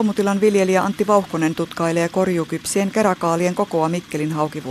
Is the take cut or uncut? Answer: uncut